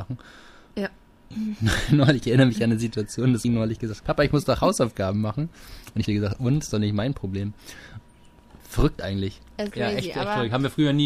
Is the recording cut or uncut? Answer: cut